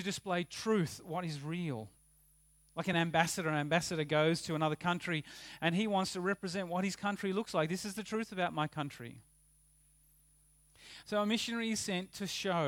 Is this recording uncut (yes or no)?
yes